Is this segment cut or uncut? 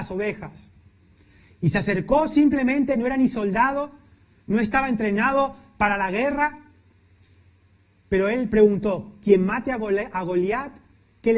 uncut